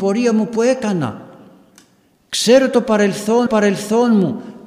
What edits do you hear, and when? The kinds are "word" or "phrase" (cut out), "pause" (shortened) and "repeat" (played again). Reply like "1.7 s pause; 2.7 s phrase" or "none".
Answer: 3.5 s repeat

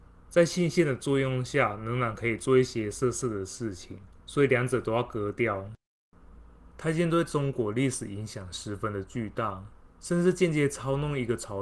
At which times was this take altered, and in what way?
4.2 s pause; 6.7 s pause; 9.8 s pause

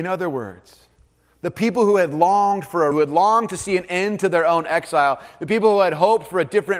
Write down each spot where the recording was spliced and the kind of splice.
2.9 s word

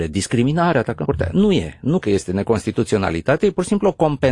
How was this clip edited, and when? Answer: 1.0 s word; 2.0 s word

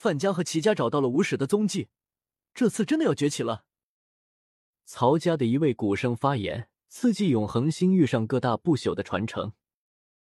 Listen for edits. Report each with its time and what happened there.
6.8 s pause

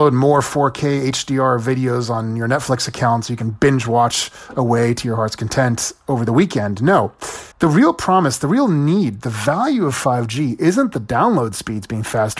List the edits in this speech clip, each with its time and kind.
7.5 s pause

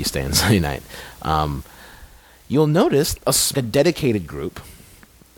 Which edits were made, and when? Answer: 3.2 s phrase; 3.5 s word

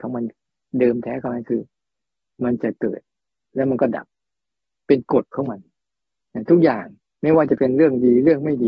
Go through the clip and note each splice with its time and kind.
7.0 s pause

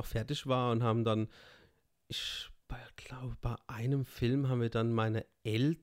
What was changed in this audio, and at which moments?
none

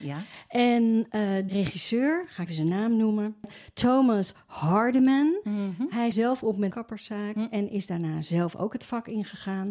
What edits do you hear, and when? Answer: 1.5 s word; 2.5 s word; 6.1 s word; 6.7 s phrase

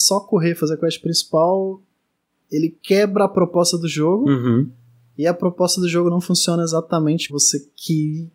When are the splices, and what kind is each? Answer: 7.3 s word

